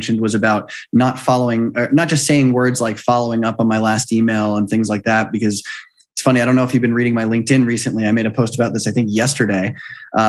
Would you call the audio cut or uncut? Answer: uncut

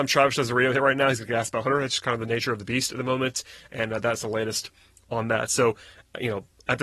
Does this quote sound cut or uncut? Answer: uncut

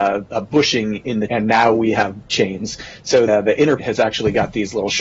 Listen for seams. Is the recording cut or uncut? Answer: cut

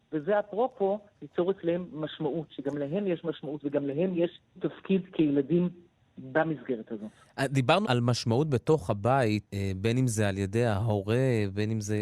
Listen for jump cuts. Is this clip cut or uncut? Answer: cut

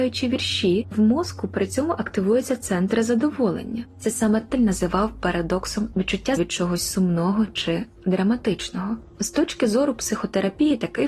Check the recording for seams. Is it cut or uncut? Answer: cut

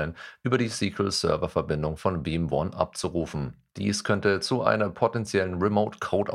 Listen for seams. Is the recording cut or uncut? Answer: cut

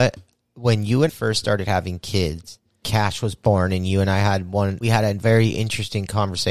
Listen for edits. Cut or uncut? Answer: cut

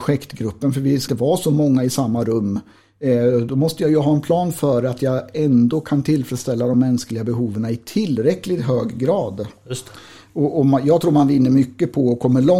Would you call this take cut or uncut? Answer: cut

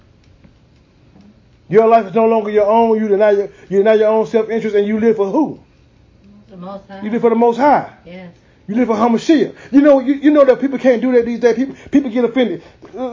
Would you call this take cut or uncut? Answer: uncut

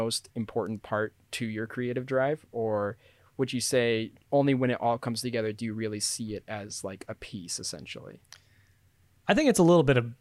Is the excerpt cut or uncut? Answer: uncut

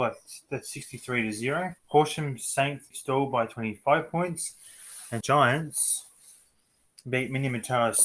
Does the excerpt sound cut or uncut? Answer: cut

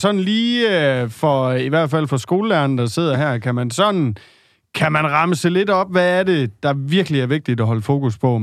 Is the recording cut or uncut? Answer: uncut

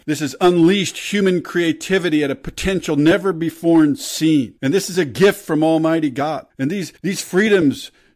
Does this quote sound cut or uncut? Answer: cut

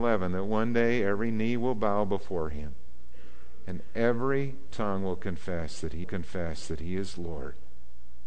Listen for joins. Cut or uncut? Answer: cut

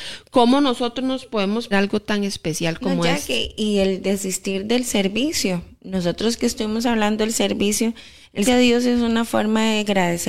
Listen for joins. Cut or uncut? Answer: cut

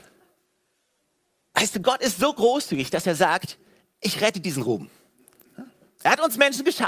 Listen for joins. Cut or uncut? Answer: uncut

